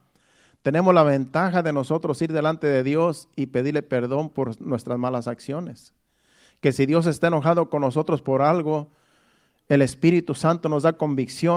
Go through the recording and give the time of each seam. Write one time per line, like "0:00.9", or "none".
none